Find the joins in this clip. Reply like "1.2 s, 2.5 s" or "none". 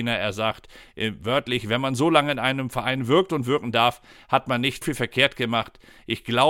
4.8 s